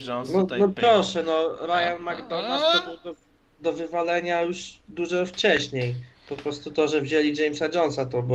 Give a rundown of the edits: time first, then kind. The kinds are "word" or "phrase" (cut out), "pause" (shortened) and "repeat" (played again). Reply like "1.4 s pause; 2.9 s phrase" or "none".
none